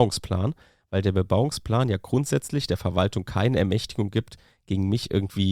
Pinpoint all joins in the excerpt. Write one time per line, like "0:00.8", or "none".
none